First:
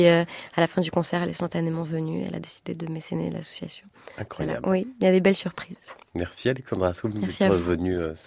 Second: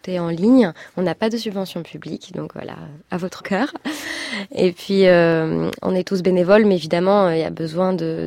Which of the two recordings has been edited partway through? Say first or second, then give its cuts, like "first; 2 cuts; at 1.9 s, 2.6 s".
second; 1 cut; at 3.4 s